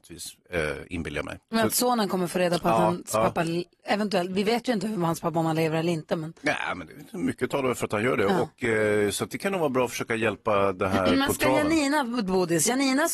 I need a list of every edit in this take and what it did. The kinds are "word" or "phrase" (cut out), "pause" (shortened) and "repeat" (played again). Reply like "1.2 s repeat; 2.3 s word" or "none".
none